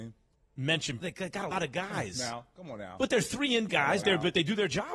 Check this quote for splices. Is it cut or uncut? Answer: cut